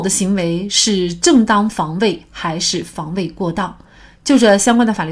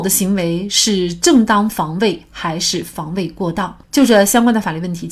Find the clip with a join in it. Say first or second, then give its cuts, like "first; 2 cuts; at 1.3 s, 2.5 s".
second; 1 cut; at 3.8 s